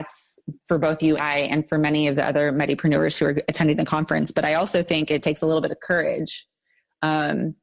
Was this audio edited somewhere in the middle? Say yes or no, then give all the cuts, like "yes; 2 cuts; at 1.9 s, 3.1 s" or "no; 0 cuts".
yes; 2 cuts; at 1.2 s, 5.2 s